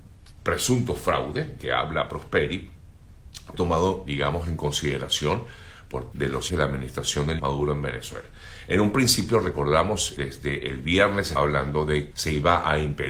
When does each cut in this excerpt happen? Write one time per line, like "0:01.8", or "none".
0:01.6
0:03.5
0:04.1
0:06.1
0:06.5
0:07.4
0:10.2
0:11.4
0:12.1